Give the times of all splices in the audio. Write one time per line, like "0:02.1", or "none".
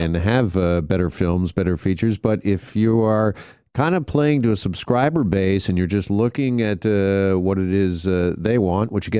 none

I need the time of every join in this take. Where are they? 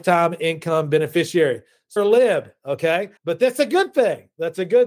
0:02.0
0:03.2

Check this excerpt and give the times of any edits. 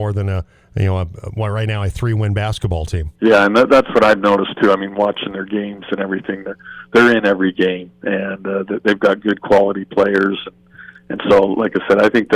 0:03.2

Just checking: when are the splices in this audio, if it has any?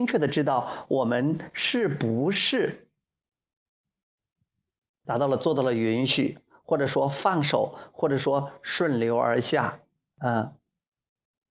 none

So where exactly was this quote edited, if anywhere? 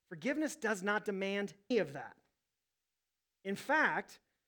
0:01.7

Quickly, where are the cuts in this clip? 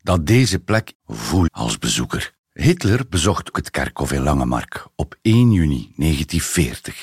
0:00.9
0:01.5
0:02.4
0:03.5

